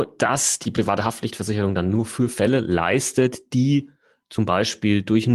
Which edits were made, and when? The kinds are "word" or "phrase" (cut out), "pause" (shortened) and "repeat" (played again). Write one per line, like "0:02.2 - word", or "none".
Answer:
none